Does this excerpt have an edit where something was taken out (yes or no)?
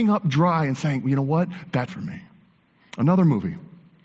yes